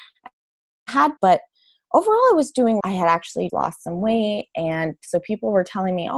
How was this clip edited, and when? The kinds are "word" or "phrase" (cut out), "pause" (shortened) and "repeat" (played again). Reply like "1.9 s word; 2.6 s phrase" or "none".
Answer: 1.2 s word; 2.8 s phrase; 3.5 s word